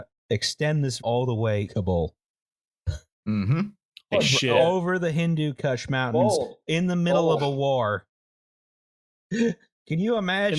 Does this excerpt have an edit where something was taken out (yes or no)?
yes